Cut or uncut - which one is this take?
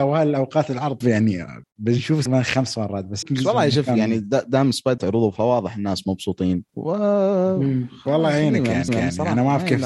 cut